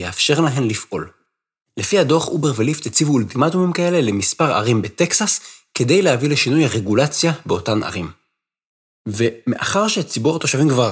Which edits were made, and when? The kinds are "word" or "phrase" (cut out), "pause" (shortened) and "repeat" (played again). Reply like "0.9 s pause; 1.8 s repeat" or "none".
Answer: none